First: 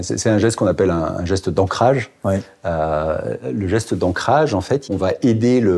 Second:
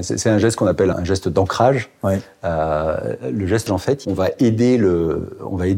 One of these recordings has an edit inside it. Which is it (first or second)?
second